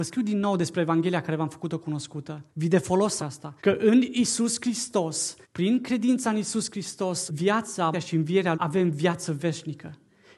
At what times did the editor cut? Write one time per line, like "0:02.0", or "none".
0:02.5
0:03.2
0:03.6
0:05.4
0:07.3
0:07.9
0:08.5